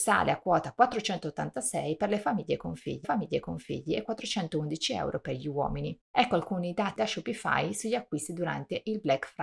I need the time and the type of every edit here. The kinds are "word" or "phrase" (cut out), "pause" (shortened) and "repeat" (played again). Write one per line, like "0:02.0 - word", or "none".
0:03.0 - repeat
0:06.0 - pause
0:07.0 - word